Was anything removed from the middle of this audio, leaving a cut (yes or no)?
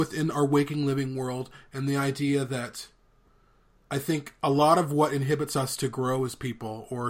no